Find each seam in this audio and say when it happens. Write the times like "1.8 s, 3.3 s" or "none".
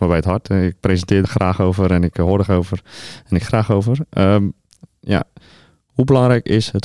1.2 s, 2.5 s, 3.4 s